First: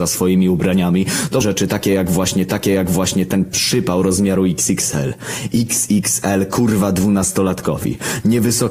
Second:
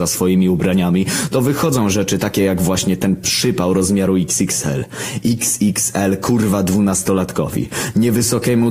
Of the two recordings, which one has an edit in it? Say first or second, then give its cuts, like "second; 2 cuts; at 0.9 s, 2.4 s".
first; 2 cuts; at 1.4 s, 2.5 s